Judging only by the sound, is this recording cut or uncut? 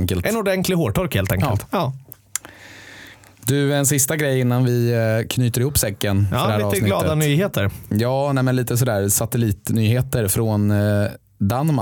uncut